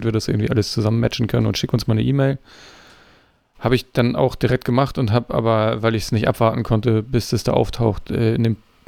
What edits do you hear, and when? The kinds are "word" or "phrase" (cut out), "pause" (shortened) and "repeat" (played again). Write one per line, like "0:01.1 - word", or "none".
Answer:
none